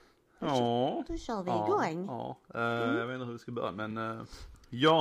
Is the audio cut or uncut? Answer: uncut